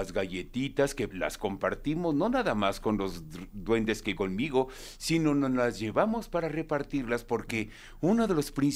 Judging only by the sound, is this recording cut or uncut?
cut